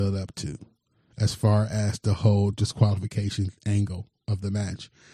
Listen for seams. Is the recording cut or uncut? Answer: uncut